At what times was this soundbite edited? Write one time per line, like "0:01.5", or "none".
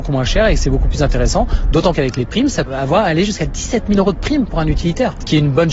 0:01.9
0:02.7